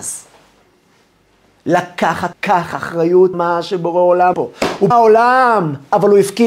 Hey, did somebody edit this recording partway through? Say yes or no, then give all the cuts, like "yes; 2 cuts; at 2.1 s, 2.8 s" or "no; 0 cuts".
yes; 4 cuts; at 2.3 s, 3.3 s, 4.3 s, 4.9 s